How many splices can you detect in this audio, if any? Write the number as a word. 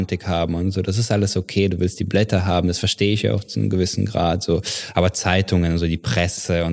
zero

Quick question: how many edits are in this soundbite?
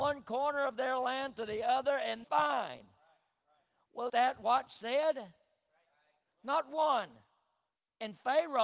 three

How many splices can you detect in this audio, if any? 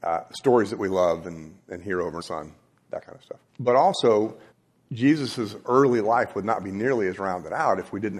three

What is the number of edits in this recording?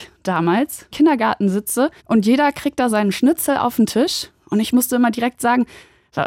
three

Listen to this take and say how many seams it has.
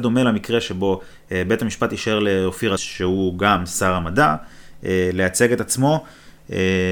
one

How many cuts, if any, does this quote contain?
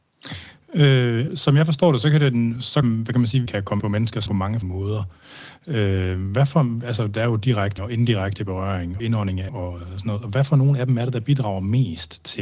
nine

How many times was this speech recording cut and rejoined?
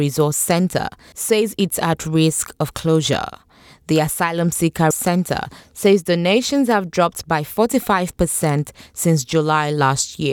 one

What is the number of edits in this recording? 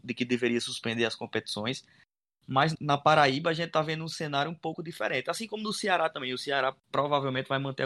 two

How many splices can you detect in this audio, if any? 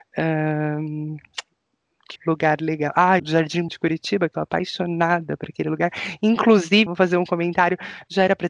five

